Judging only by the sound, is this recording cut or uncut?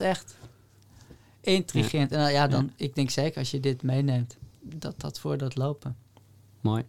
uncut